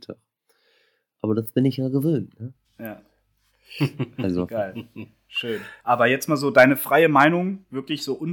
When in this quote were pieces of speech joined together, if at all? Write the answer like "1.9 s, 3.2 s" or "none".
2.6 s, 5.8 s